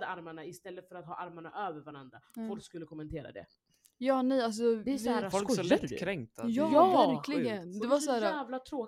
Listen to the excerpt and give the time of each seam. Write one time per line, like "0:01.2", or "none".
none